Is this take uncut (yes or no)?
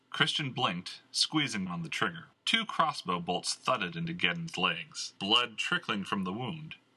no